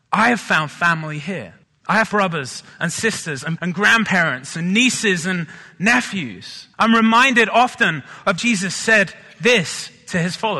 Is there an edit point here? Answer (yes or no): yes